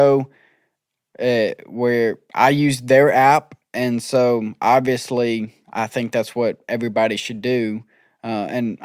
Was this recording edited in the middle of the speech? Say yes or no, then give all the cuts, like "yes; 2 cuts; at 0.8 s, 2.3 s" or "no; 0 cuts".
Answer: no; 0 cuts